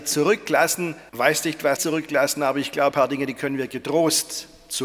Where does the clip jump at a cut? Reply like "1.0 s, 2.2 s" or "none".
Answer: 1.1 s, 1.8 s, 2.9 s